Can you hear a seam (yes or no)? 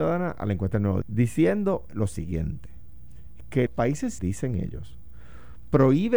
yes